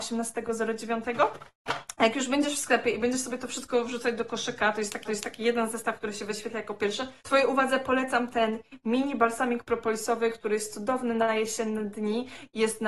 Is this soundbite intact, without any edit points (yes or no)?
no